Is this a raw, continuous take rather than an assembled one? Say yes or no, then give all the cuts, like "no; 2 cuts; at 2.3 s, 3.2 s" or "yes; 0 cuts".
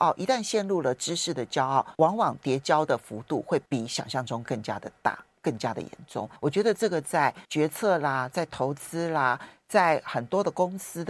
no; 4 cuts; at 1.9 s, 3.7 s, 6.4 s, 7.4 s